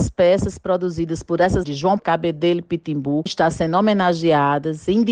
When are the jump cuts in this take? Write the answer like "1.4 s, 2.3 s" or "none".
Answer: 1.6 s, 2.0 s, 3.3 s